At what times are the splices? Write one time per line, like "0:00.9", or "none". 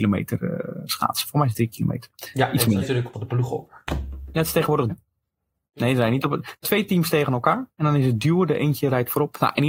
0:02.8
0:03.1
0:04.9
0:06.6
0:07.7